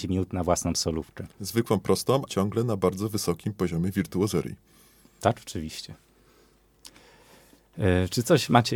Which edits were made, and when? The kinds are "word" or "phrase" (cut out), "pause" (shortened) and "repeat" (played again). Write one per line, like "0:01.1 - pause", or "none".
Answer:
0:01.3 - pause
0:02.3 - word